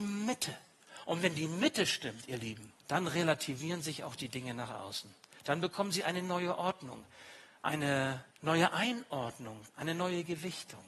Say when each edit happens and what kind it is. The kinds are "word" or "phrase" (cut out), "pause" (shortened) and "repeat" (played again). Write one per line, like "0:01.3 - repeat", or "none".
0:02.8 - pause
0:08.3 - pause
0:09.7 - pause